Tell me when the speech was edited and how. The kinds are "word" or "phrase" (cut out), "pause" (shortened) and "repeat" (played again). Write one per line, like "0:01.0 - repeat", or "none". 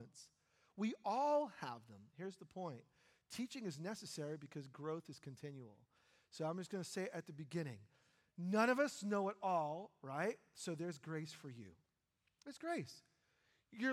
none

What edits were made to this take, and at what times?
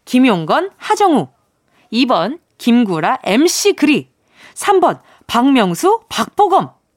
none

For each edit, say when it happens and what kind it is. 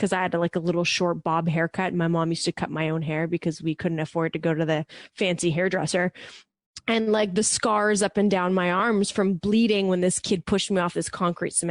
none

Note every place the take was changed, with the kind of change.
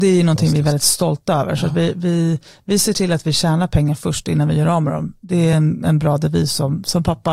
none

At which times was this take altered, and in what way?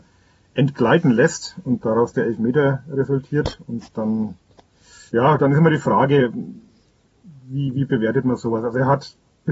0:05.1 - pause

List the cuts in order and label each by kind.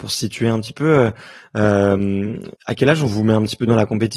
0:02.6 - pause

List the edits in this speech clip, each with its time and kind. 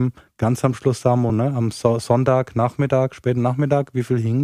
none

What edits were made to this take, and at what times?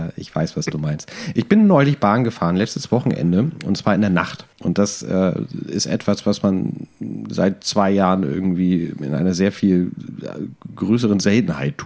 0:04.5 - pause

